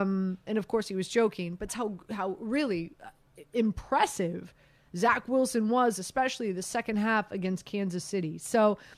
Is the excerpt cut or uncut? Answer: cut